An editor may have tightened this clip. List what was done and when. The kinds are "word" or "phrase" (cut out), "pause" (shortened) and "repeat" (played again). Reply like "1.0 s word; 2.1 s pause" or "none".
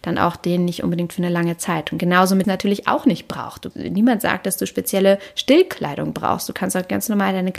2.4 s phrase; 3.7 s word